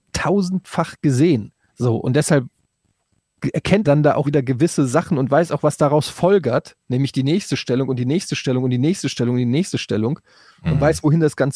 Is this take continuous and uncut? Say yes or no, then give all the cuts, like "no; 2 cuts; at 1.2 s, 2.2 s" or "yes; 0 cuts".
no; 3 cuts; at 1.7 s, 3.8 s, 4.2 s